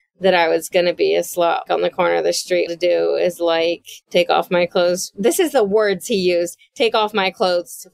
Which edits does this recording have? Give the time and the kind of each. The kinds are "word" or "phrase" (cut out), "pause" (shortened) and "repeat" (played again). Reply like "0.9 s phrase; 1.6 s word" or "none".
1.7 s word; 2.7 s phrase; 4.0 s pause